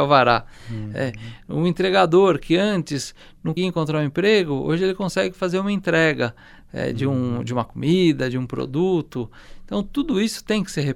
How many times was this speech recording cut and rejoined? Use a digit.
1